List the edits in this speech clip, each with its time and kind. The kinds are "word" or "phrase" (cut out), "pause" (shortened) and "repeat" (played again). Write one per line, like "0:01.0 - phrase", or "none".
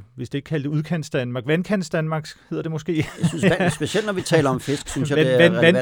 none